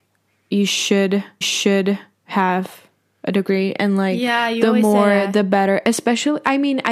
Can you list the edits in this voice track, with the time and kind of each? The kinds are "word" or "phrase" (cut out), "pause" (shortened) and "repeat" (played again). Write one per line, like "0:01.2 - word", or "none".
0:01.4 - repeat